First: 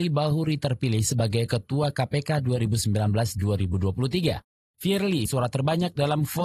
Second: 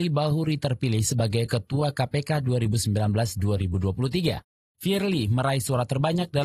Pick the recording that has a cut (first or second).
first